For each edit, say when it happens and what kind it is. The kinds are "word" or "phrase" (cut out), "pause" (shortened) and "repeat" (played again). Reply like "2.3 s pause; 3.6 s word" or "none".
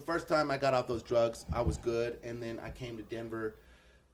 none